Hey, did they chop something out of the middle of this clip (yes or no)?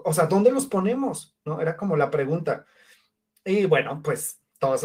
no